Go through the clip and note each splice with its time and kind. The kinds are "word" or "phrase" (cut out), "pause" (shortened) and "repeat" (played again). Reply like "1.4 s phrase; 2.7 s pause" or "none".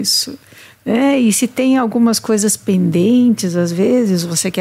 none